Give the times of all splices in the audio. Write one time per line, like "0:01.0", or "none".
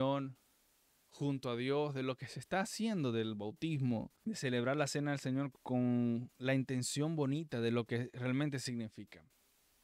0:04.2
0:05.5